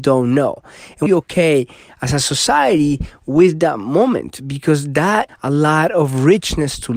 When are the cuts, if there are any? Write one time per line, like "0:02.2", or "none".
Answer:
0:01.1
0:05.3